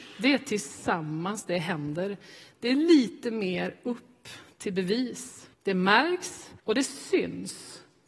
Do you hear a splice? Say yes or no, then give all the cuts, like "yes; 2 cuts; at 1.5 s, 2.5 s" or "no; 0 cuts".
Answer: yes; 2 cuts; at 5.5 s, 6.6 s